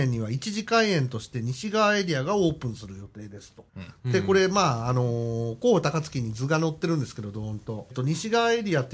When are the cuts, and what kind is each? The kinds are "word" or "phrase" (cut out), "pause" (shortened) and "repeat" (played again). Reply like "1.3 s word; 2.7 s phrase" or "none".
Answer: 3.7 s pause; 7.9 s phrase